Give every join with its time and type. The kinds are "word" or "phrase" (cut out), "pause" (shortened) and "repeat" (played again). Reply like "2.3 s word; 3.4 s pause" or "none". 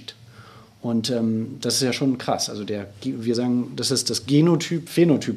none